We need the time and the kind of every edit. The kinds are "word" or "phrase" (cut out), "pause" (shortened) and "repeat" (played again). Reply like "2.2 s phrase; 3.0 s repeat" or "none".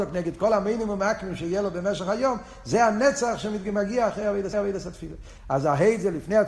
4.5 s repeat